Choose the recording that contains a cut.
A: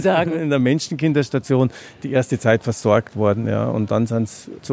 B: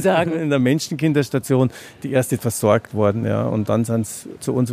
B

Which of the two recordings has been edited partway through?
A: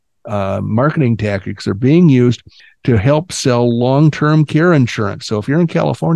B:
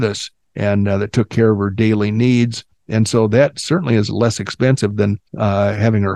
B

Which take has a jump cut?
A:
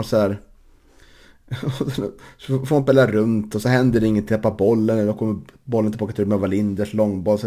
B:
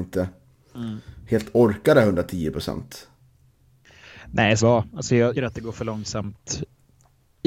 B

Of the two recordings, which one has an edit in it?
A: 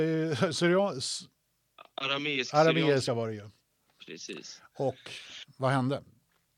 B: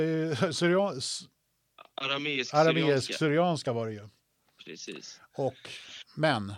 A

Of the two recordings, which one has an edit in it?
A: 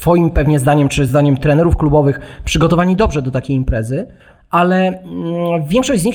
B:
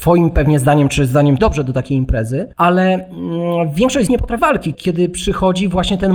B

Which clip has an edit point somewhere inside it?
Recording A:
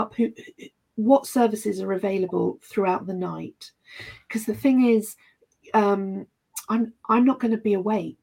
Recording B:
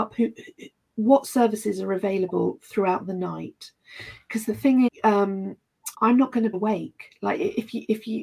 B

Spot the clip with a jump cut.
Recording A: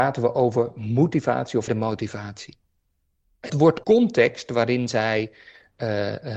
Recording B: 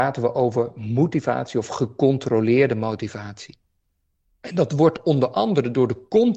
A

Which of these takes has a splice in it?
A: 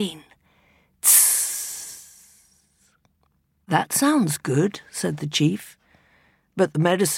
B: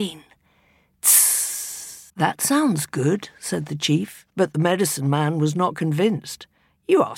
B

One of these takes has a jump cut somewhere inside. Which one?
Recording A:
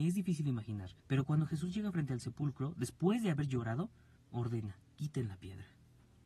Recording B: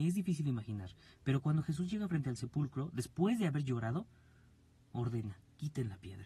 A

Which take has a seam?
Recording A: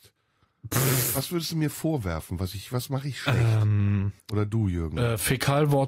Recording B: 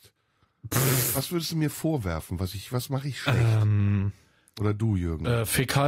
A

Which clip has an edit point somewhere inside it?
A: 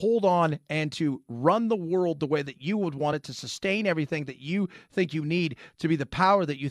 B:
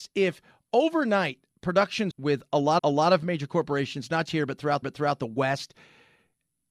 B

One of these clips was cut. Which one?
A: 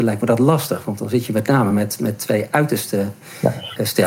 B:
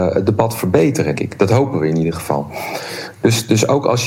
B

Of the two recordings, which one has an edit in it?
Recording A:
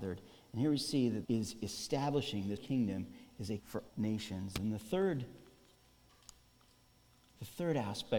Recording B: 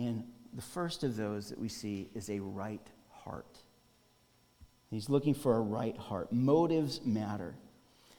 A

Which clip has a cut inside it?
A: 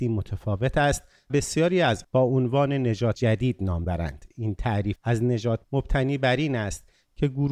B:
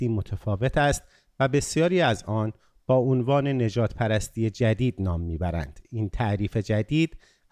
A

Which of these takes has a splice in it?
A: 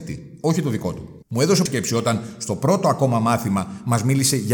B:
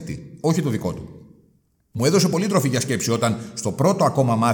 A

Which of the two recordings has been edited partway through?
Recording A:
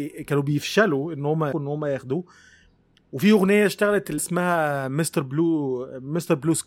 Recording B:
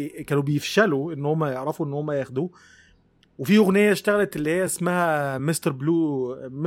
A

